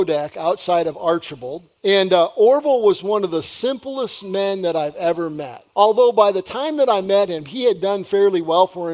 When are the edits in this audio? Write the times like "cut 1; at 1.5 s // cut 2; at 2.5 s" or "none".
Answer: cut 1; at 1.8 s // cut 2; at 5.7 s